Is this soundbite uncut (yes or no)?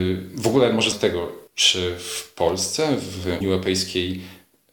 no